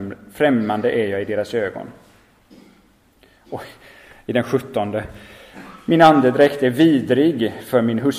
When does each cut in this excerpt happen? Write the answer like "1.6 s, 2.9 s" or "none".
none